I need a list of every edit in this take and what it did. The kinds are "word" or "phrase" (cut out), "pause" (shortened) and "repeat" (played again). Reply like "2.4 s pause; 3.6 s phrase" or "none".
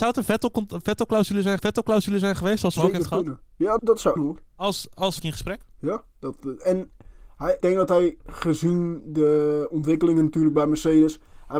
1.6 s repeat; 2.8 s word; 3.8 s word; 4.2 s phrase; 4.5 s pause; 5.2 s phrase; 5.7 s pause; 7.6 s word